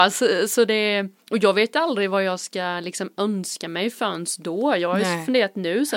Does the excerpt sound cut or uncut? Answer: uncut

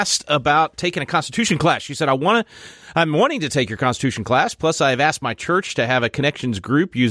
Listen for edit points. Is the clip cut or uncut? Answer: uncut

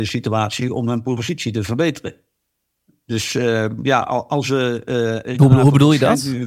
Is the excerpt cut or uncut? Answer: uncut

